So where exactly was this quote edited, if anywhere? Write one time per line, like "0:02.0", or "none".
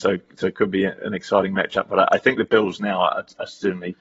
none